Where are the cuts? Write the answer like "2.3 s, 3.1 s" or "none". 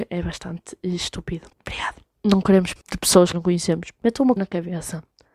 1.5 s, 2.8 s, 3.3 s, 4.4 s